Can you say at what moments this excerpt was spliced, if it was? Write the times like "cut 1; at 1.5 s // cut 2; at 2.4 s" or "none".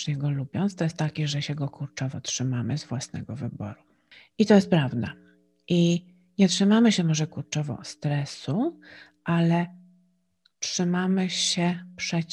none